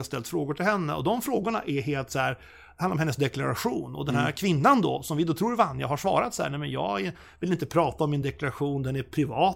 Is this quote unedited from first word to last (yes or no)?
yes